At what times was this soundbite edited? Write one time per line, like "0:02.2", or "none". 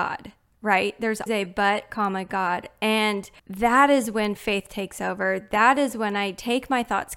0:01.3
0:03.4